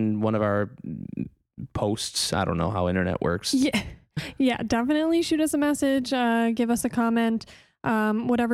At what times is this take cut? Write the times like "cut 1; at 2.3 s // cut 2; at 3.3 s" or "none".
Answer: none